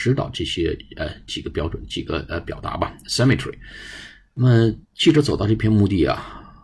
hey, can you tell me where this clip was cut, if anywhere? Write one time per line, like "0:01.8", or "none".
0:04.8